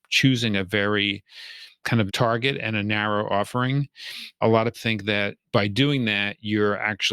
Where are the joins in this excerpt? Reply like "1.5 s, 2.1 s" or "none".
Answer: 2.1 s, 4.7 s, 5.4 s

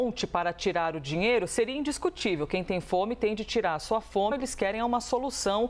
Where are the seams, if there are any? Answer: 4.3 s

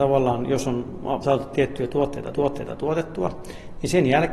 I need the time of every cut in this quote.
1.2 s, 2.3 s

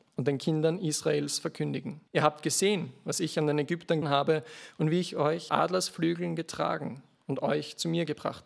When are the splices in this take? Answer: 2.1 s, 4.0 s, 5.5 s

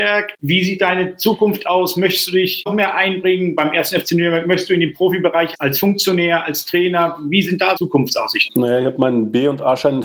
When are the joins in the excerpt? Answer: 2.7 s, 7.8 s

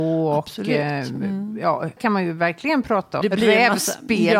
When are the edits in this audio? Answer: 2.0 s, 3.2 s

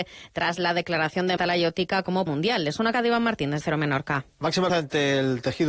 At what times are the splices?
1.4 s, 2.3 s, 2.9 s, 3.6 s, 4.7 s

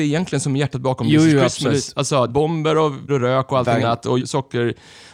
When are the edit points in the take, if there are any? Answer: 2.3 s, 3.1 s, 3.8 s, 4.2 s

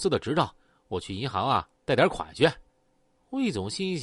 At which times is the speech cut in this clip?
2.7 s

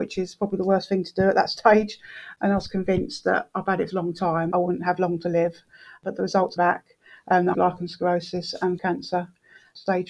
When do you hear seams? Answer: 3.9 s, 4.5 s, 6.6 s, 7.5 s, 8.8 s

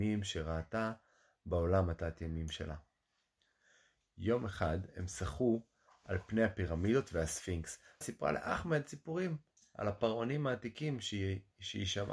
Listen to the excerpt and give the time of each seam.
8.0 s

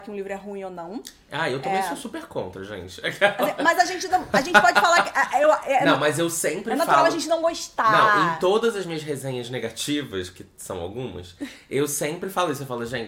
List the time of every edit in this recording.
none

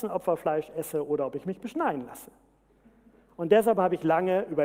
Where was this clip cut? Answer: none

